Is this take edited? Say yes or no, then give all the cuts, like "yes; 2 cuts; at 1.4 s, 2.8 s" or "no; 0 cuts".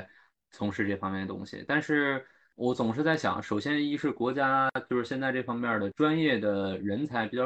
no; 0 cuts